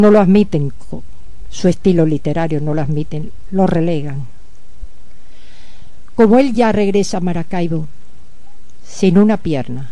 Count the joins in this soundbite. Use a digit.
0